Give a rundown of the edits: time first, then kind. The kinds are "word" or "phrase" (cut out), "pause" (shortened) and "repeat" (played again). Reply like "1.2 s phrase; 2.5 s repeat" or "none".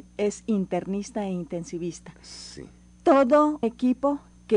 3.6 s word

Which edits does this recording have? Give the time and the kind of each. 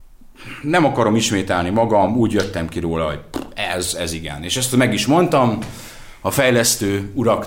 none

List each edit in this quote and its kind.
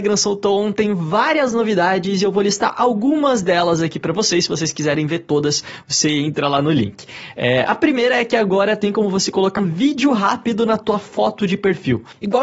9.6 s word

